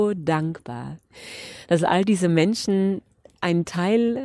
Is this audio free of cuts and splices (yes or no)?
yes